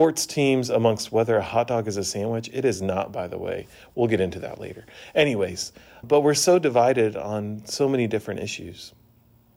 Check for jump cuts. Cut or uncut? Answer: cut